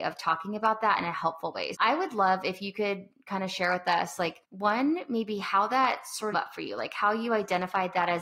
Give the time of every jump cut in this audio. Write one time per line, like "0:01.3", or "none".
0:01.7
0:04.4
0:06.3